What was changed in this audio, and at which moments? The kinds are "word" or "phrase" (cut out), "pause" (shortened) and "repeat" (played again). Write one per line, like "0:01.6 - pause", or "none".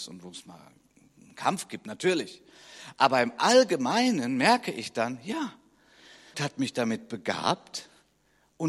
0:06.3 - word